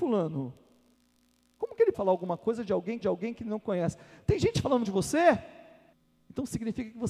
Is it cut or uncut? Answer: cut